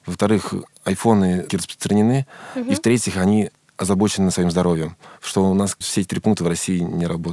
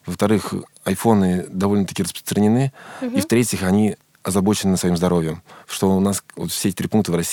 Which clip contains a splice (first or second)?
first